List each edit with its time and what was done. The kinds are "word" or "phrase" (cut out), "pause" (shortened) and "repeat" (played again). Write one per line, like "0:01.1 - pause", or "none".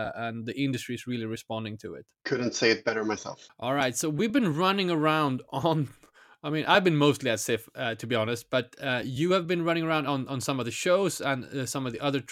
none